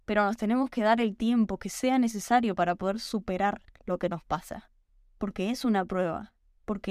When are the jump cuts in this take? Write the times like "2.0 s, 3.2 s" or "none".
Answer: 4.9 s